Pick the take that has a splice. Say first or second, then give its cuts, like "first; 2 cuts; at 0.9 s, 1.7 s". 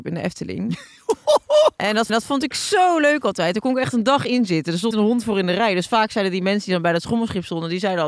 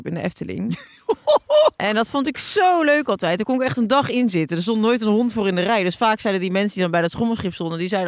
first; 2 cuts; at 2.1 s, 4.9 s